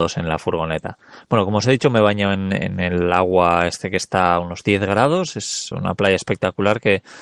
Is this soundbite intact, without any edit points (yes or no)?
no